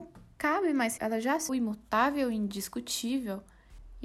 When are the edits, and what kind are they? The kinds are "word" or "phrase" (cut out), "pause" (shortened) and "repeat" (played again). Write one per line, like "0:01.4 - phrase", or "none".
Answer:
0:01.0 - word
0:01.5 - word